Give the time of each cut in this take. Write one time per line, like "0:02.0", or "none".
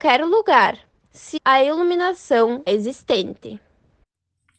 0:01.1
0:01.4
0:02.7